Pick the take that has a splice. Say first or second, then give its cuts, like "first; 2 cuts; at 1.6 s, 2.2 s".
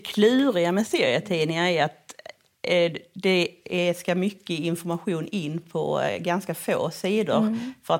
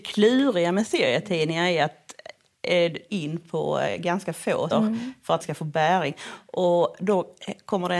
second; 3 cuts; at 3.1 s, 4.7 s, 5.4 s